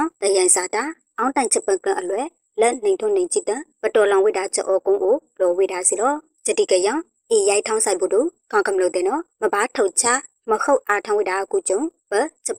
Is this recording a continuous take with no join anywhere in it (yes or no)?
yes